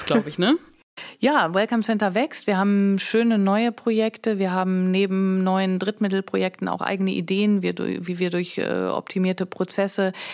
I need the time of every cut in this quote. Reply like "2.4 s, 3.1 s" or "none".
none